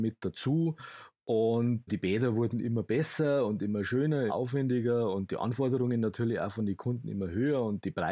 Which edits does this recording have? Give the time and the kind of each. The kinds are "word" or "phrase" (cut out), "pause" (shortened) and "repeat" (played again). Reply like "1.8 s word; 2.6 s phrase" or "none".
1.9 s word; 4.3 s word